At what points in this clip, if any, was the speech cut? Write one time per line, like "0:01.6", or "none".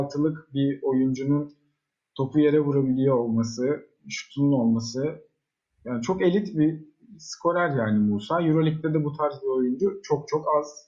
none